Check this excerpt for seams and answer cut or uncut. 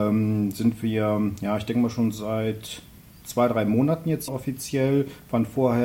cut